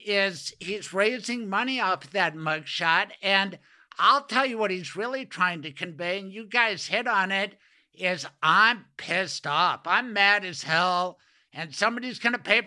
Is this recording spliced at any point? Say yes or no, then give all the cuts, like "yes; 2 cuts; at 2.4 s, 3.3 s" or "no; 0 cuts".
no; 0 cuts